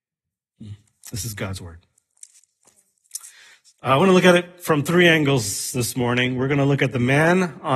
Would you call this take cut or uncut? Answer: uncut